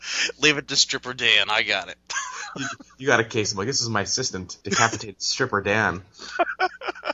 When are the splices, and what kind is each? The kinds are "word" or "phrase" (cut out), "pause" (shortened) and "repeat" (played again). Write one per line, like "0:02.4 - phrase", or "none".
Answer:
0:04.6 - pause

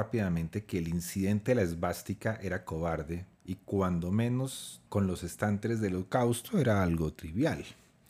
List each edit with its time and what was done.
0:04.9 - pause

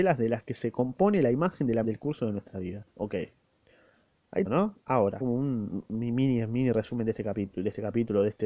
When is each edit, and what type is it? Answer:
0:01.8 - word
0:02.9 - pause
0:04.4 - word
0:05.2 - word

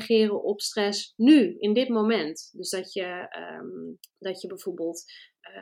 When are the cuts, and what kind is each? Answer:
0:04.0 - pause

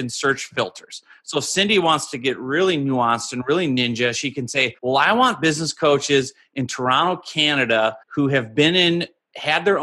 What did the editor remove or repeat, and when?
0:04.8 - pause
0:08.0 - pause

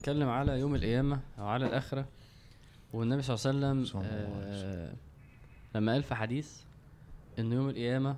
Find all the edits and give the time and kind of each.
none

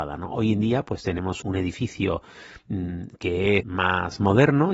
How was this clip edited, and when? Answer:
0:01.4 - word
0:03.6 - word

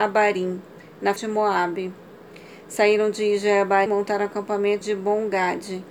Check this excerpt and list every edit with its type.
0:01.2 - word
0:03.9 - word
0:04.8 - word

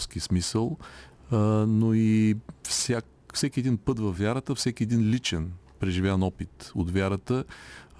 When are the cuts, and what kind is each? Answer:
none

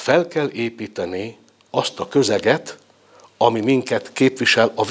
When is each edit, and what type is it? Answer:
none

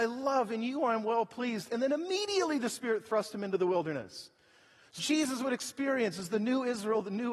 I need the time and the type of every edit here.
0:05.0 - word

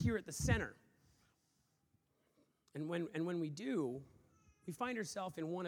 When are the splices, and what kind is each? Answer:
none

